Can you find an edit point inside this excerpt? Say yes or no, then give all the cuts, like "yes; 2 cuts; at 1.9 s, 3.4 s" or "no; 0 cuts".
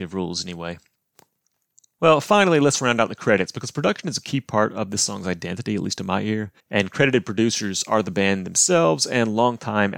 yes; 1 cut; at 6.6 s